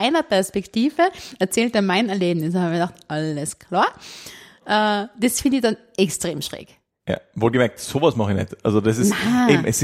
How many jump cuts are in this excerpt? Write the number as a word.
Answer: zero